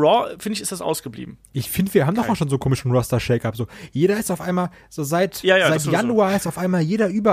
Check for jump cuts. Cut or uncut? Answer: uncut